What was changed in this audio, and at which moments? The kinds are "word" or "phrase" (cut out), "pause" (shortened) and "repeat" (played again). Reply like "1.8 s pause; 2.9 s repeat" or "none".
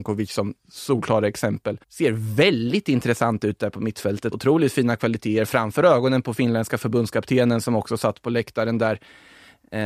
1.8 s pause; 4.3 s word

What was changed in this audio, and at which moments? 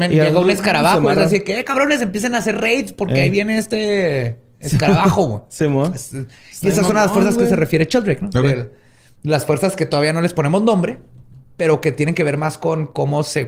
none

